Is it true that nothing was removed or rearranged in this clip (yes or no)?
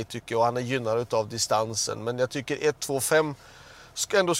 yes